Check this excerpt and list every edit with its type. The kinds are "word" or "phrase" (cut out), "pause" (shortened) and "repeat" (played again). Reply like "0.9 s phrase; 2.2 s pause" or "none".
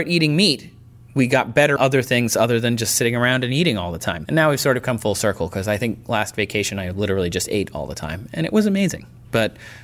1.8 s phrase